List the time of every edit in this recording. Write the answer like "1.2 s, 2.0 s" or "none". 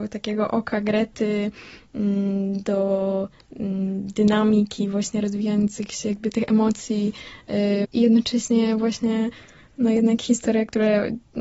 7.8 s